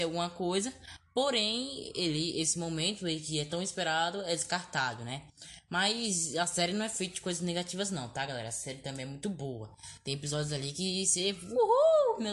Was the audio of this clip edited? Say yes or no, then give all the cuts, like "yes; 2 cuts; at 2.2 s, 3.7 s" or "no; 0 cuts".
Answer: no; 0 cuts